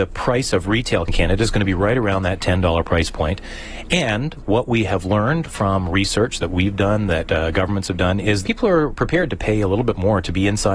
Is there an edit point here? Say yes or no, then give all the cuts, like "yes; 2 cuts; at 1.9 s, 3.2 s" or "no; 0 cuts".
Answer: yes; 2 cuts; at 1.1 s, 8.4 s